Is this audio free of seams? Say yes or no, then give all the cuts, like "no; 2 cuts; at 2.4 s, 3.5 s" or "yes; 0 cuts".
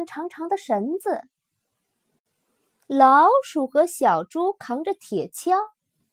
yes; 0 cuts